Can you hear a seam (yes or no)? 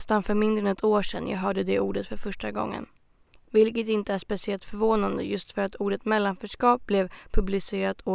no